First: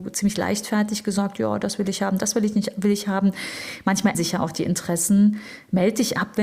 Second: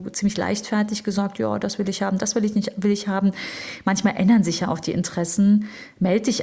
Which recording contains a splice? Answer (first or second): first